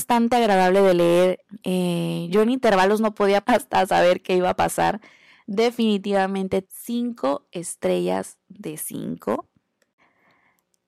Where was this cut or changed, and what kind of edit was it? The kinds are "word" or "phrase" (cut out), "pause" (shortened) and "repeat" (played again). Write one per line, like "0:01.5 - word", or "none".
0:03.4 - word
0:06.6 - word